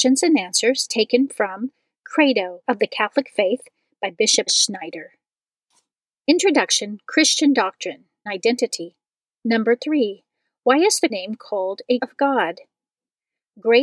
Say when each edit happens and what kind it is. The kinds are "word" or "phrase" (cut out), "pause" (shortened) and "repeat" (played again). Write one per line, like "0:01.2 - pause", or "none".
0:02.6 - word
0:04.5 - word
0:08.3 - word
0:11.1 - word
0:12.0 - word

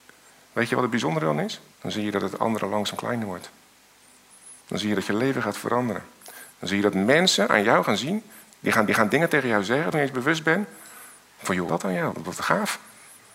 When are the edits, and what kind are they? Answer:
0:01.7 - pause
0:04.6 - pause
0:08.9 - repeat
0:09.9 - phrase
0:11.7 - phrase
0:12.1 - word

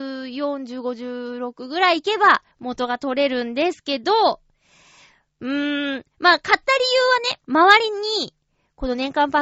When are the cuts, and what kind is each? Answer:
0:02.5 - pause
0:07.4 - pause

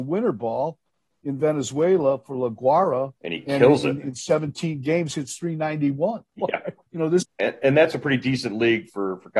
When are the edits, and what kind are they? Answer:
0:03.2 - pause
0:06.3 - word
0:06.9 - word
0:07.2 - phrase

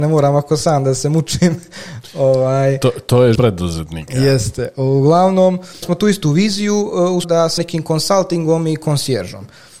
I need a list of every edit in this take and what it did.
0:03.3 - word
0:05.8 - word
0:07.2 - word
0:07.6 - word

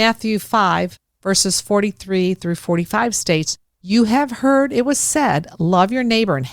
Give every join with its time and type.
none

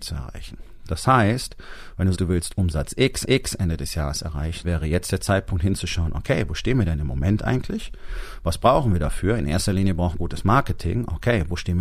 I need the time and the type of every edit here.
0:02.1 - word
0:03.2 - repeat
0:04.6 - word
0:10.1 - word

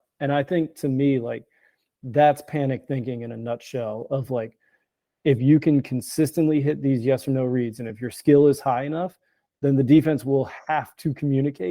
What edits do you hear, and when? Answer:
none

